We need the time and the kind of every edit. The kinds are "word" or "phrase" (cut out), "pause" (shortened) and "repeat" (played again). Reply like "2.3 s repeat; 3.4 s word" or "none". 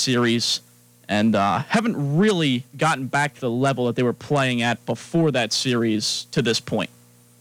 2.7 s pause